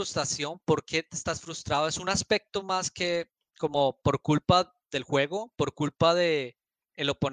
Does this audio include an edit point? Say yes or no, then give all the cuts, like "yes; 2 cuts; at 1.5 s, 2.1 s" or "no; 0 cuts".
no; 0 cuts